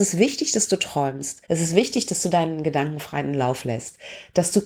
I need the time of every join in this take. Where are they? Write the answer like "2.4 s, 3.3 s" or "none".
1.4 s